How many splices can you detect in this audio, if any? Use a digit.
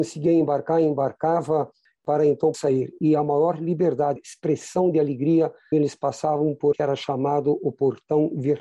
4